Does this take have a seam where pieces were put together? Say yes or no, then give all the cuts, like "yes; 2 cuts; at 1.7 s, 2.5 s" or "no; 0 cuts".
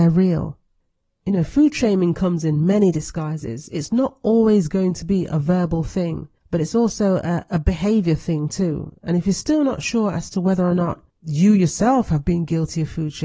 yes; 2 cuts; at 6.4 s, 11.1 s